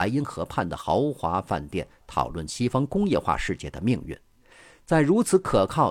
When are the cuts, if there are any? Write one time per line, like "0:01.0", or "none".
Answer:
none